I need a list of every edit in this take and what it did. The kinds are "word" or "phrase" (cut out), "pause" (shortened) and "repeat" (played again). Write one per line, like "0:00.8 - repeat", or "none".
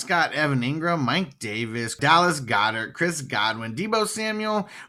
none